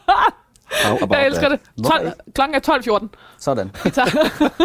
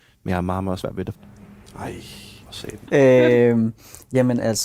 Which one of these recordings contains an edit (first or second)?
second